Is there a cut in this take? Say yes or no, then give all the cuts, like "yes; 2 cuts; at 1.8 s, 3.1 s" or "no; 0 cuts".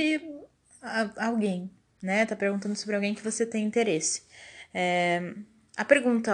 no; 0 cuts